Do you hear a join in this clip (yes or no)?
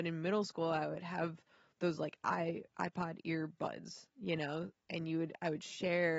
no